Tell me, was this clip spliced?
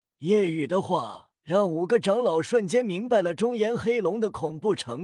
yes; 1 cut; at 1.4 s

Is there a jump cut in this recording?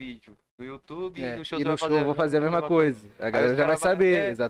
no; 0 cuts

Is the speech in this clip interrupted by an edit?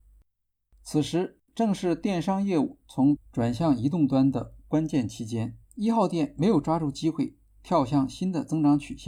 yes; 3 cuts; at 1.5 s, 3.2 s, 5.6 s

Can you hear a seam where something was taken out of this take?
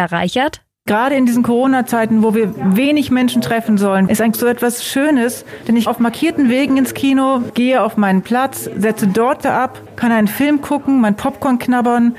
yes; 3 cuts; at 4.3 s, 5.9 s, 9.4 s

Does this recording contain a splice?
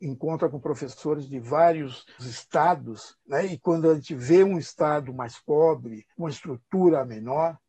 yes; 3 cuts; at 2.2 s, 3.2 s, 6.1 s

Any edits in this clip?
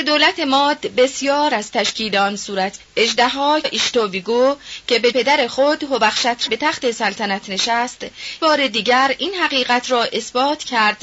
yes; 6 cuts; at 1.5 s, 2.8 s, 3.6 s, 5.1 s, 6.5 s, 8.4 s

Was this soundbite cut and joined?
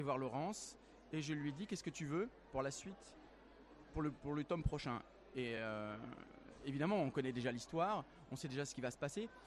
no; 0 cuts

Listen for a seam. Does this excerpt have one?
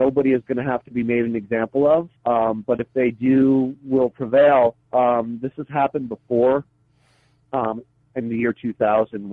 yes; 2 cuts; at 2.2 s, 4.8 s

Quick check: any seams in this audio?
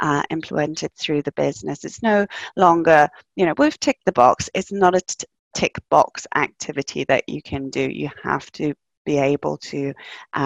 no; 0 cuts

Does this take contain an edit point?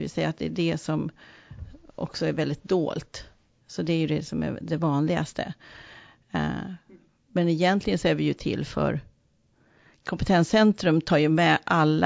no; 0 cuts

